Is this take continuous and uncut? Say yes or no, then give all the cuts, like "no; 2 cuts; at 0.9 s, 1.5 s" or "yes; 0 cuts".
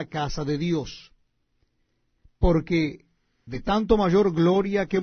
yes; 0 cuts